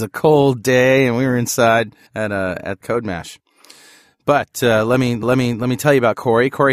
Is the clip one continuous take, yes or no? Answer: no